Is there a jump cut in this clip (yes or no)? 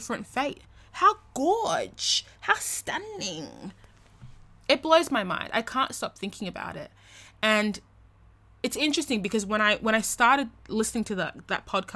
no